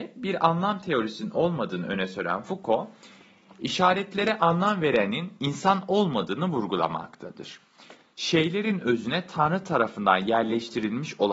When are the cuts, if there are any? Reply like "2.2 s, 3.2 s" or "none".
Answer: none